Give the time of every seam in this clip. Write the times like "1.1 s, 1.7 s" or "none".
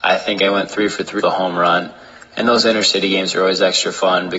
1.2 s